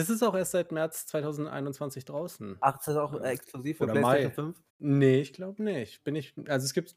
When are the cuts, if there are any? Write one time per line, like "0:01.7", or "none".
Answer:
0:04.7